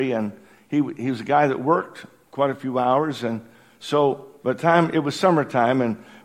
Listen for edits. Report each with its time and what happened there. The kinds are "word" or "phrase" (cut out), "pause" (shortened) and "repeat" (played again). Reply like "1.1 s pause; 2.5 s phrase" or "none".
none